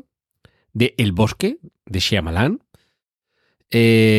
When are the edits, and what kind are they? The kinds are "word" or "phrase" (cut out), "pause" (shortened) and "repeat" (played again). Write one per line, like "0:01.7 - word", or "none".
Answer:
none